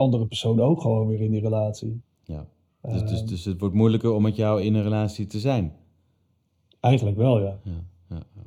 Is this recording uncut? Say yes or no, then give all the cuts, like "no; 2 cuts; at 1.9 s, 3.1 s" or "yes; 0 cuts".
yes; 0 cuts